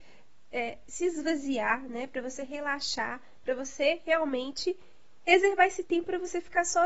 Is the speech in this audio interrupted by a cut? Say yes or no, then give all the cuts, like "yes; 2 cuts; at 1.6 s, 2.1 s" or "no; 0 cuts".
no; 0 cuts